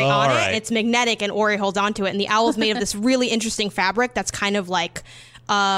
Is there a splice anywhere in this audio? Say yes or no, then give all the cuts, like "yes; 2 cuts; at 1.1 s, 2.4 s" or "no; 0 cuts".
no; 0 cuts